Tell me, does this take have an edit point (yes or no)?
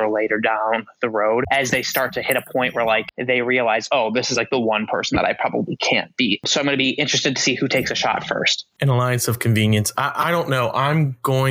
no